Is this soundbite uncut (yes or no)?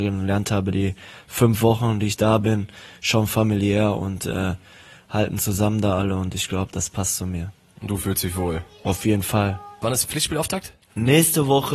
yes